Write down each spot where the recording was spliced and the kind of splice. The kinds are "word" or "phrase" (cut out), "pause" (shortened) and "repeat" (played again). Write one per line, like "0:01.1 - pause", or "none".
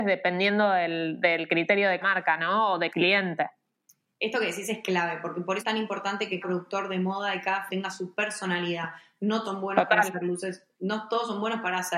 0:02.0 - word
0:02.9 - word
0:05.6 - word
0:06.4 - word
0:07.7 - word
0:09.4 - word